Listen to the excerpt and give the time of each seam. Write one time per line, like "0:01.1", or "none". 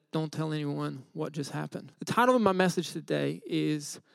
0:01.9